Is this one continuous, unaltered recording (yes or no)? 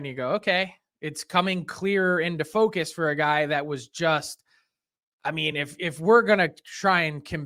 yes